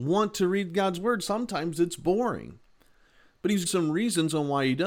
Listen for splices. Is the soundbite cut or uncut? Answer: cut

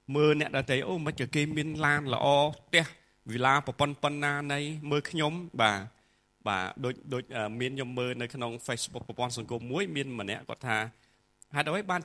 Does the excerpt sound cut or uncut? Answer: uncut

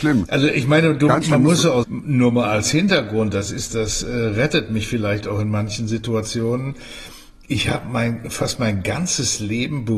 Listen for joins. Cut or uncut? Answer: cut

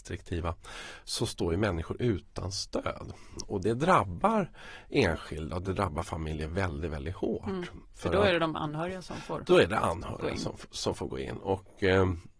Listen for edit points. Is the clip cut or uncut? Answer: uncut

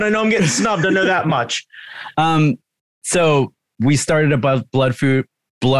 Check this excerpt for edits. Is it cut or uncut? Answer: uncut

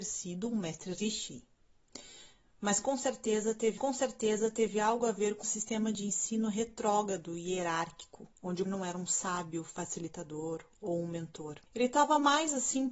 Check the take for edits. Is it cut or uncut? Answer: cut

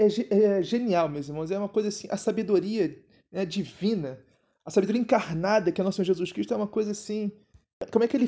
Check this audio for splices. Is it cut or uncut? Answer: uncut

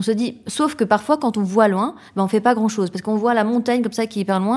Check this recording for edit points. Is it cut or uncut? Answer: uncut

